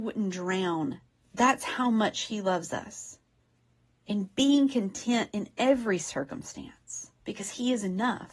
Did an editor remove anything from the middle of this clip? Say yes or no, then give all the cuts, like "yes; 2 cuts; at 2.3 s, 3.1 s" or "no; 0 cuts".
yes; 3 cuts; at 1.1 s, 3.4 s, 7.2 s